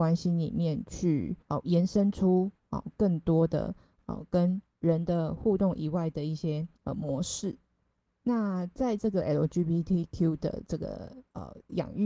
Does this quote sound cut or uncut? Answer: cut